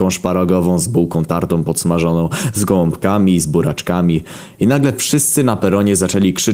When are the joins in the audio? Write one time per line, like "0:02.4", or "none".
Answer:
none